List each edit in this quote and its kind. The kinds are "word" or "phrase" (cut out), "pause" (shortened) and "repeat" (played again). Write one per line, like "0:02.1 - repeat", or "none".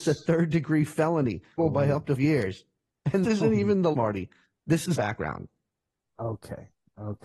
0:01.6 - word
0:02.2 - word
0:03.2 - word
0:03.9 - word
0:04.9 - word